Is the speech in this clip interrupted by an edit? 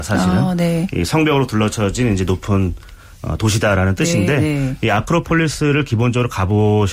no; 0 cuts

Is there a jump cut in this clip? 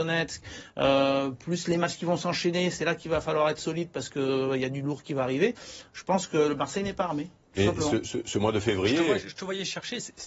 no; 0 cuts

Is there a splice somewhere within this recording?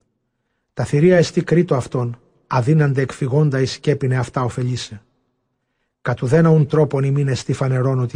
no; 0 cuts

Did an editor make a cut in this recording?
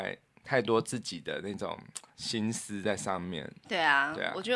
yes; 1 cut; at 2.1 s

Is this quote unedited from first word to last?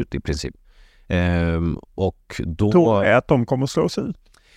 yes; 0 cuts

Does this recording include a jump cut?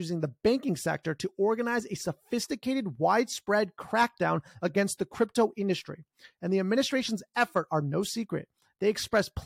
no; 0 cuts

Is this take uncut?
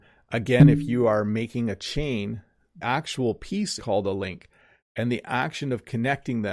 no; 2 cuts; at 2.8 s, 3.8 s

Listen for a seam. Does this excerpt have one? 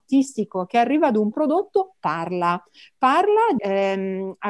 yes; 2 cuts; at 1.3 s, 3.6 s

